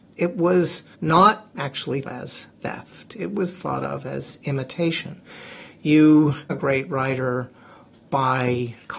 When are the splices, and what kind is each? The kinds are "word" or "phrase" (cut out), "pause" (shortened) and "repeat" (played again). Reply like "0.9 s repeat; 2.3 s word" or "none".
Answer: 0.9 s pause; 2.0 s phrase; 2.5 s pause; 6.5 s word